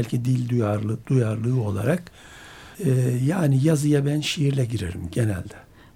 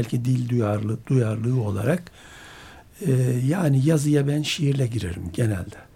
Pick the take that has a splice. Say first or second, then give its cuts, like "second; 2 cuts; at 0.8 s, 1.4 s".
first; 1 cut; at 2.7 s